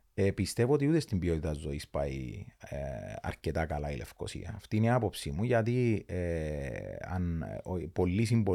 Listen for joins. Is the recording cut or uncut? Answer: uncut